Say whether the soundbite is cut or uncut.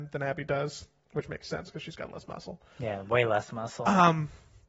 uncut